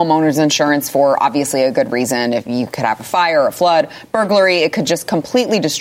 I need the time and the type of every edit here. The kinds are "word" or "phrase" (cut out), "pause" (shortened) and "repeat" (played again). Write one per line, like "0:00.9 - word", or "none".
none